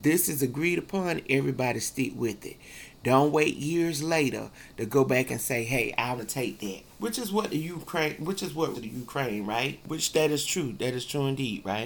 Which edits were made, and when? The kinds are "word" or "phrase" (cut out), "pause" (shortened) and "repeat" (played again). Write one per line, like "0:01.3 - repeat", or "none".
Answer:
0:06.2 - word
0:06.9 - pause
0:08.7 - phrase